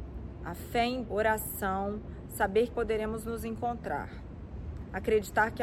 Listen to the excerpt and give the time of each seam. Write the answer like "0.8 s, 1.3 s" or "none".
1.0 s, 2.7 s